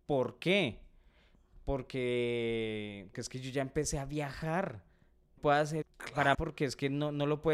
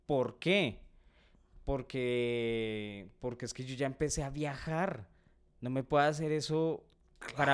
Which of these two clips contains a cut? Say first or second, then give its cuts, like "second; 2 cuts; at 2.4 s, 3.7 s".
first; 4 cuts; at 3.1 s, 5.4 s, 5.8 s, 6.3 s